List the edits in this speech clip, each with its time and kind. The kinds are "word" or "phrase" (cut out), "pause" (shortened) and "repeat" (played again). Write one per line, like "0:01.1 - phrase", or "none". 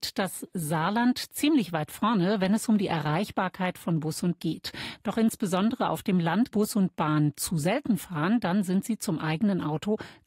0:04.4 - word
0:06.5 - phrase